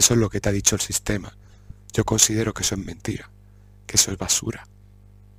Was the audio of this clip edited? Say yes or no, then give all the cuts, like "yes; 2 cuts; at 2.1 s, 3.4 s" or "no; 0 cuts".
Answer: no; 0 cuts